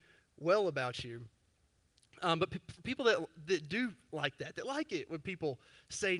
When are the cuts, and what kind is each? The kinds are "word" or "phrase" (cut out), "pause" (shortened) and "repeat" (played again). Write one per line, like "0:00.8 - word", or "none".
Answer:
none

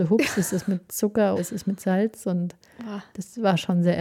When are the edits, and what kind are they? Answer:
0:01.4 - word

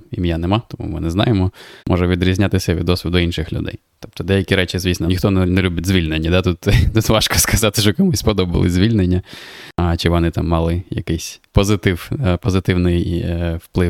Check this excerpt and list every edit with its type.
0:01.8 - pause
0:05.1 - word
0:09.7 - pause

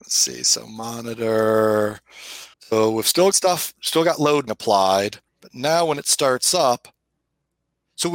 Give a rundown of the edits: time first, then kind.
0:02.5 - pause
0:03.3 - word
0:04.5 - word
0:05.3 - pause

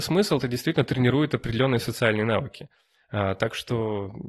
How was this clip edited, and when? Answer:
none

